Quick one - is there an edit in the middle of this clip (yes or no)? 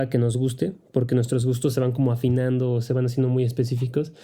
no